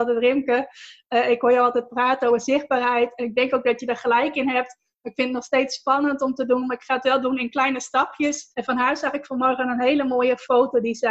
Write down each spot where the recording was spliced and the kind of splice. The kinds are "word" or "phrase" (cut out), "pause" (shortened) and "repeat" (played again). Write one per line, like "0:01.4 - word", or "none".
0:08.5 - pause